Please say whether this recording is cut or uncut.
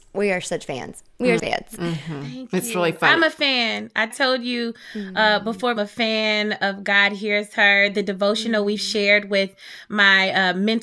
cut